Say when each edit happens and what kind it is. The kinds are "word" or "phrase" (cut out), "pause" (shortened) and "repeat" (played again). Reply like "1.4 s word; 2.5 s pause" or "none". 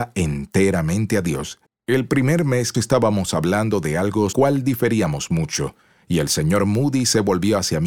1.7 s pause; 2.7 s phrase; 4.3 s phrase